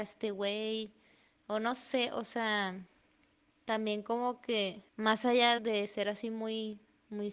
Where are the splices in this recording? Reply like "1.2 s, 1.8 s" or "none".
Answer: 3.5 s, 4.9 s, 5.6 s